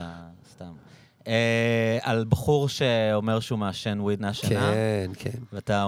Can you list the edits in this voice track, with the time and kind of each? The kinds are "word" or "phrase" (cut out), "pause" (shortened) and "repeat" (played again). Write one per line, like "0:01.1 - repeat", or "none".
0:04.2 - word